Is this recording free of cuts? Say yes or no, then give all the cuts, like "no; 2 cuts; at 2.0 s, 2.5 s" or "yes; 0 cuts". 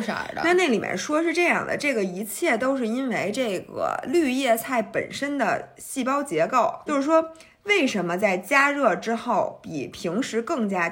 no; 1 cut; at 6.9 s